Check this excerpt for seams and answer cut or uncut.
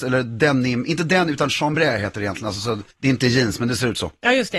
cut